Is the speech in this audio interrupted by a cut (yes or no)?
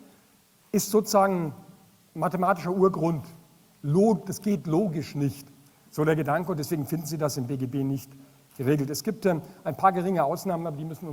no